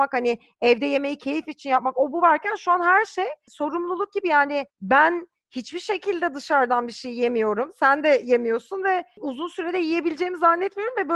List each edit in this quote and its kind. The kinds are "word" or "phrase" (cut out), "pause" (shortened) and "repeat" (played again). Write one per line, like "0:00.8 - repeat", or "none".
0:04.7 - pause